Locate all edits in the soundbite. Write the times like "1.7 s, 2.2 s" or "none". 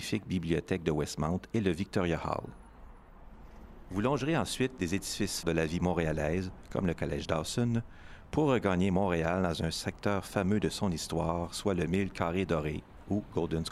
5.4 s